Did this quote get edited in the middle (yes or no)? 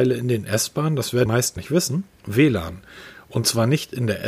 yes